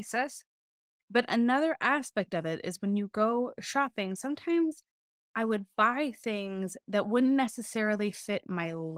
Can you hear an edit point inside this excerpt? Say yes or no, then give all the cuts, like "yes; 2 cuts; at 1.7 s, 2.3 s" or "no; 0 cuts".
no; 0 cuts